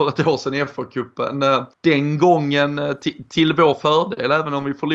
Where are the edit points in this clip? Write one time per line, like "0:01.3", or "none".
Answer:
0:01.7